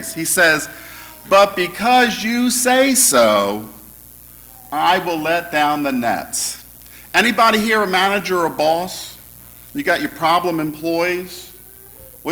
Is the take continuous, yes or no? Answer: yes